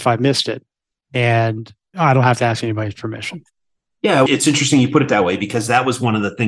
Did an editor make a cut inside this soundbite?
no; 0 cuts

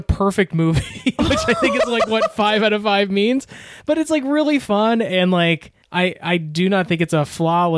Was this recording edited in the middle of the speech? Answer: yes; 1 cut; at 5.8 s

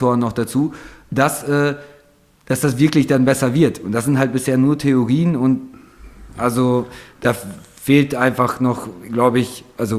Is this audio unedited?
yes; 0 cuts

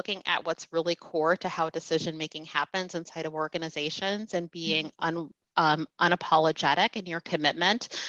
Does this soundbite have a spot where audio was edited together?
no; 0 cuts

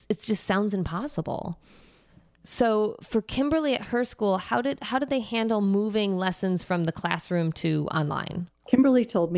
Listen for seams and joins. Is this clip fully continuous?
yes; 0 cuts

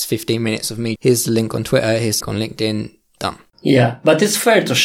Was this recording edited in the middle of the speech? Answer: yes; 2 cuts; at 1.0 s, 2.2 s

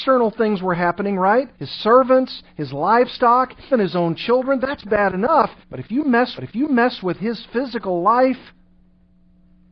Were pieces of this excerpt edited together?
yes; 4 cuts; at 1.5 s, 3.7 s, 5.6 s, 6.4 s

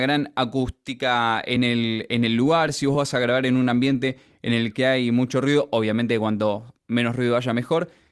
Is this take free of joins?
yes; 0 cuts

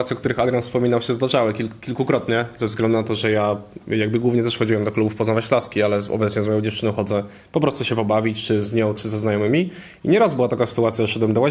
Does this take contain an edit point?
yes; 1 cut; at 9.0 s

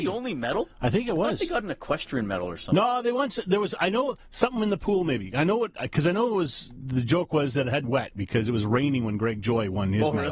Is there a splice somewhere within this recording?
yes; 1 cut; at 7.8 s

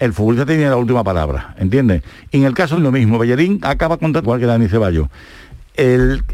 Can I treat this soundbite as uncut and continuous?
no; 2 cuts; at 2.8 s, 4.2 s

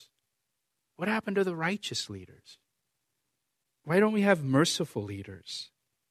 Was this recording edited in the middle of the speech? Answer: no; 0 cuts

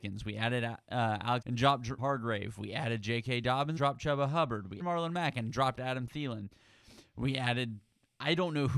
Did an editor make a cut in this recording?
yes; 4 cuts; at 1.4 s, 2.0 s, 3.8 s, 4.8 s

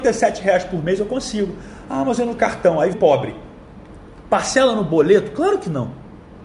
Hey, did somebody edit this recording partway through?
yes; 2 cuts; at 2.4 s, 2.9 s

